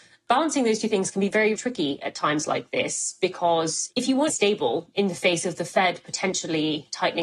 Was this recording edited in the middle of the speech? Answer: yes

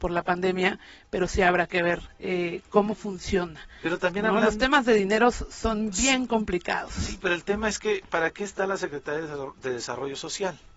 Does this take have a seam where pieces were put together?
no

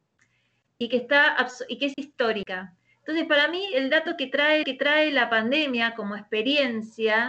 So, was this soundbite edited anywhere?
yes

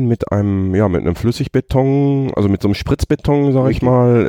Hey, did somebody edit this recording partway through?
no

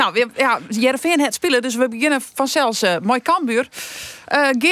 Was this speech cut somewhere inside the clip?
yes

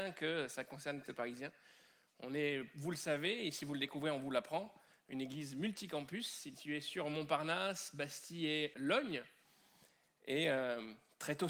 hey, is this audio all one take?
no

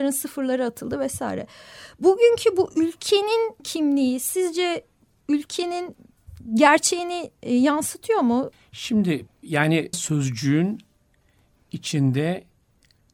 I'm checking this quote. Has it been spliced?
yes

